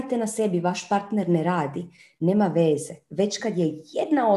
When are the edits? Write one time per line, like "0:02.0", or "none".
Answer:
none